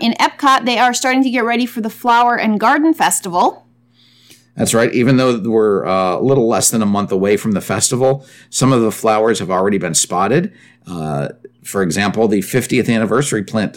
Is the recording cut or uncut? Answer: uncut